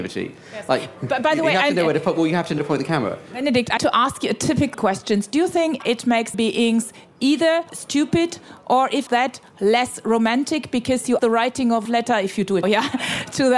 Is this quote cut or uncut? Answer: cut